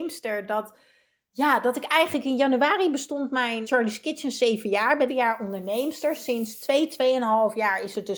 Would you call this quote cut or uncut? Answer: cut